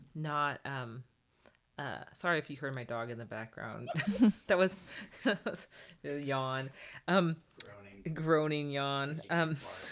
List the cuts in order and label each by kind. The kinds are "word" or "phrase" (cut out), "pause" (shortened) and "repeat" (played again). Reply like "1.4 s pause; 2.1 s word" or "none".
none